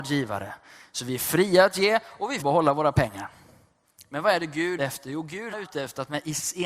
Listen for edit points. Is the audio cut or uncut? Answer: cut